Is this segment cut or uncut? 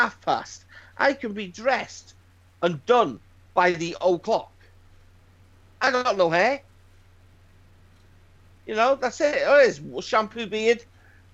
uncut